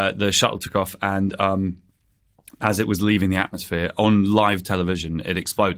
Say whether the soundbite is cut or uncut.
uncut